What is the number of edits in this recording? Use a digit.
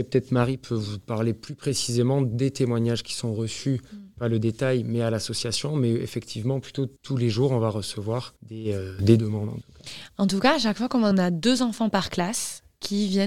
3